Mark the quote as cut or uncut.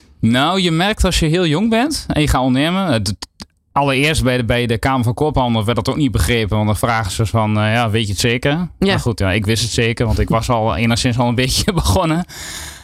uncut